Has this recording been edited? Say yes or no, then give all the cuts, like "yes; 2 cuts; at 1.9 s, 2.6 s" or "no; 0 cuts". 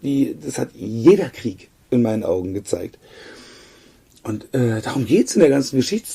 no; 0 cuts